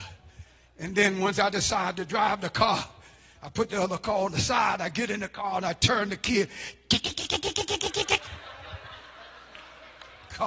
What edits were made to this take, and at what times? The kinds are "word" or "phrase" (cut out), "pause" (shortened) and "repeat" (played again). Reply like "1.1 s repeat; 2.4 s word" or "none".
none